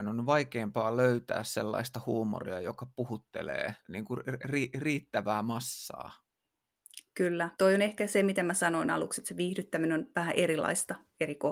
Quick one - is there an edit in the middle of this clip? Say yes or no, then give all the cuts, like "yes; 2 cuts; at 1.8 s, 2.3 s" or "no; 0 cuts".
yes; 2 cuts; at 3.8 s, 7.5 s